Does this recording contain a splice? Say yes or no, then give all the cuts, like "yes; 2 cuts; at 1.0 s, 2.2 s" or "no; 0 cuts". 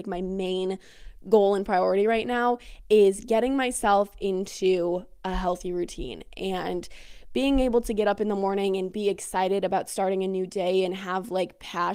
no; 0 cuts